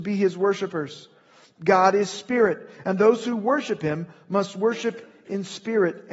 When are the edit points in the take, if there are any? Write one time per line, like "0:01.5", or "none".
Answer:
none

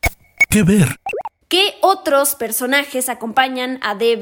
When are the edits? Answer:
0:01.4

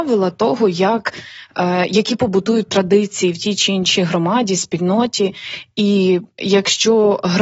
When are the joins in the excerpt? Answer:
none

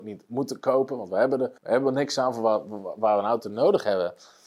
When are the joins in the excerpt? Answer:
0:01.6

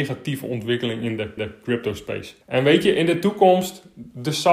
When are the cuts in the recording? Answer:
0:01.4
0:02.4

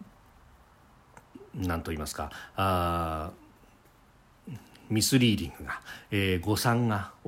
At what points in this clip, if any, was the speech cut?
none

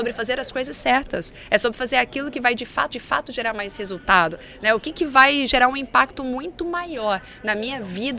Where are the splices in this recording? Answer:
0:02.9

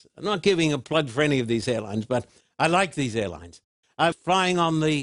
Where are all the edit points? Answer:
0:04.1

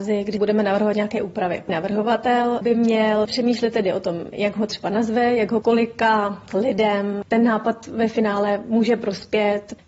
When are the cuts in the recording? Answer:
0:05.6

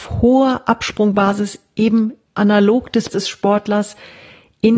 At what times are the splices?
0:02.3
0:03.1

